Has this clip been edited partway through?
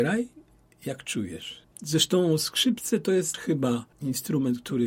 no; 0 cuts

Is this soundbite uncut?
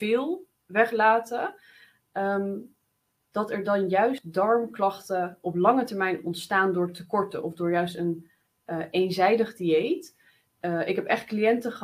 yes; 0 cuts

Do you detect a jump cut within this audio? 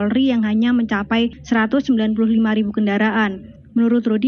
no; 0 cuts

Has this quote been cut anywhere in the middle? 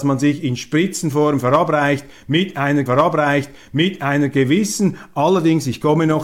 yes; 1 cut; at 2.9 s

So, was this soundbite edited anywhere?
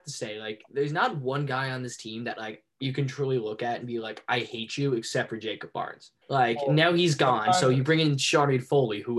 yes; 1 cut; at 6.2 s

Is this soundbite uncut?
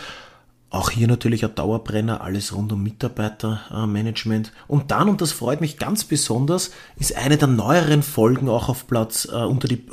no; 1 cut; at 4.6 s

